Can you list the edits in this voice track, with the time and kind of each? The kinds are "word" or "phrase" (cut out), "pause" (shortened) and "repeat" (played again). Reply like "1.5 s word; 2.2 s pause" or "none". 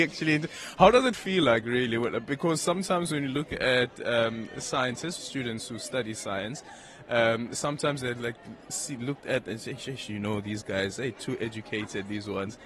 5.2 s phrase